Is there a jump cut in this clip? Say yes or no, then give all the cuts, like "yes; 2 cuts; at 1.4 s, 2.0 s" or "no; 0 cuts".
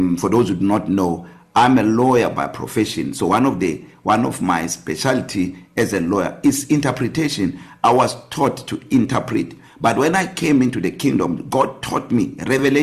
no; 0 cuts